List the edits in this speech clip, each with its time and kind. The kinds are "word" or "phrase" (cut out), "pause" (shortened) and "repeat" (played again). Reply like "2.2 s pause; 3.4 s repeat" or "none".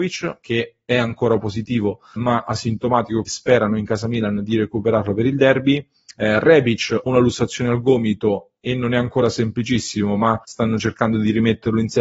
2.2 s word; 3.3 s word; 7.1 s word; 10.4 s pause